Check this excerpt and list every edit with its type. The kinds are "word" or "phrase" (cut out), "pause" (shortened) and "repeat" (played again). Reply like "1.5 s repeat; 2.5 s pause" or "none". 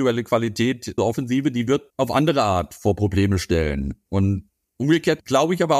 1.0 s word; 1.9 s word